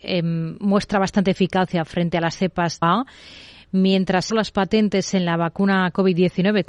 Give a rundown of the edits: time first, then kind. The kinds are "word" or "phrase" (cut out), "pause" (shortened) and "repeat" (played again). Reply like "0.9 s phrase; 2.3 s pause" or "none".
2.8 s word; 4.3 s phrase

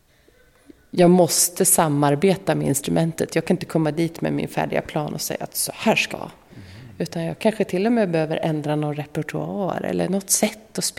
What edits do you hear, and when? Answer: 6.1 s word

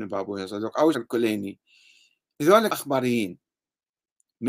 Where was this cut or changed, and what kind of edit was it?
0.9 s word; 2.7 s word

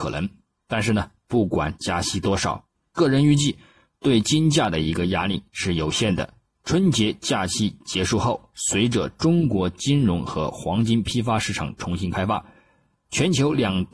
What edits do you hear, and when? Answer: none

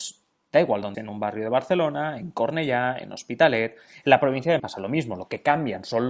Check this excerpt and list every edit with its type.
0.9 s word; 4.6 s word

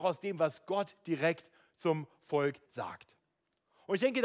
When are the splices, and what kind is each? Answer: 2.7 s word

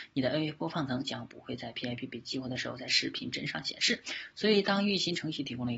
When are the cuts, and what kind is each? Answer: none

